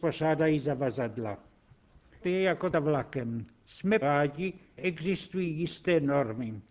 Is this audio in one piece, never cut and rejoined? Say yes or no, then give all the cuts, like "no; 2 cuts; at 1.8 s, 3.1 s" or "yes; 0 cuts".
no; 4 cuts; at 2.2 s, 2.7 s, 4.0 s, 4.8 s